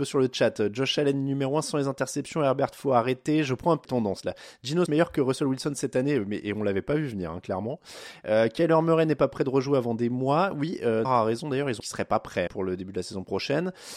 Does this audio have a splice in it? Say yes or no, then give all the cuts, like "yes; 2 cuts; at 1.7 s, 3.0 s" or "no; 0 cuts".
yes; 5 cuts; at 3.8 s, 4.9 s, 11.0 s, 11.8 s, 12.5 s